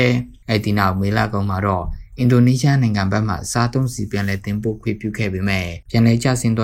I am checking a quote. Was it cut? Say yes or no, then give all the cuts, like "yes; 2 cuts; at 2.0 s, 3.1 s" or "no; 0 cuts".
no; 0 cuts